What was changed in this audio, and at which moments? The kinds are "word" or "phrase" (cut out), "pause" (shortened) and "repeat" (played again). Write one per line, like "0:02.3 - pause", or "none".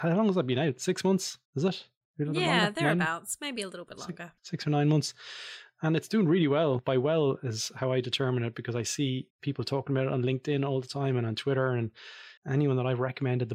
0:01.5 - pause
0:02.0 - pause
0:04.4 - pause
0:09.3 - pause
0:12.4 - pause